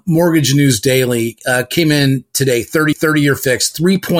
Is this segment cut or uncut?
cut